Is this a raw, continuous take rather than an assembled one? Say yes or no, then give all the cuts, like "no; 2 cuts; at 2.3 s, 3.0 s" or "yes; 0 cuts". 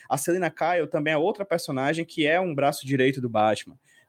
yes; 0 cuts